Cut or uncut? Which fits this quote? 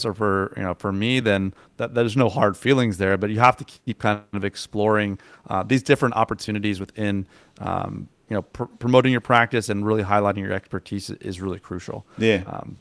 uncut